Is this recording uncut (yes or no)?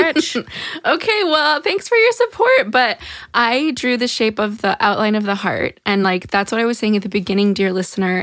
yes